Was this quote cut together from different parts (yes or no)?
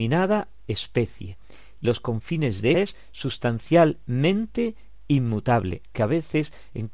yes